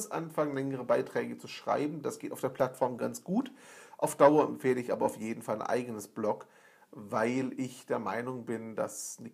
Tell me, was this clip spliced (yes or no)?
no